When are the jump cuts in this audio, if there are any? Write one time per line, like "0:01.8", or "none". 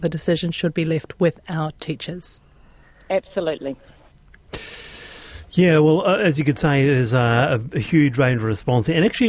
none